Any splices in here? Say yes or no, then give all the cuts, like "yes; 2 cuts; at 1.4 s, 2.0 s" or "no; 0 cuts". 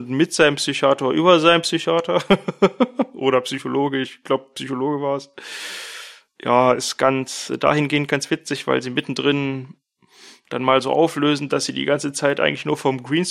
no; 0 cuts